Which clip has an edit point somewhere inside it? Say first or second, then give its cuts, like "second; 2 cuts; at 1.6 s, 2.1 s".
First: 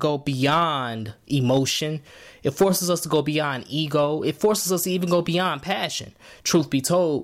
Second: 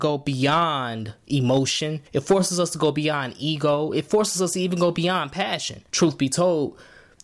second; 2 cuts; at 2.1 s, 5.9 s